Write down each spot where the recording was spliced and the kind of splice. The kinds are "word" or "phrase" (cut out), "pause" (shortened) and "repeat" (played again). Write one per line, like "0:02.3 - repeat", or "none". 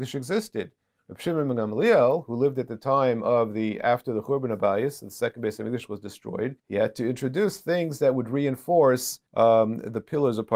0:06.6 - pause
0:09.3 - pause